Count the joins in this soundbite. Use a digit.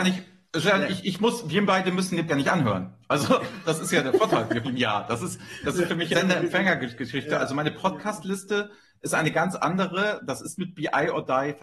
4